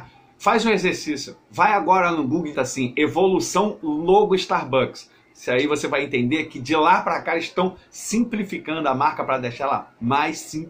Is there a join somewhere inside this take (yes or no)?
yes